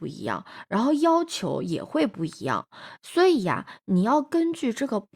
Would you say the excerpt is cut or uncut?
uncut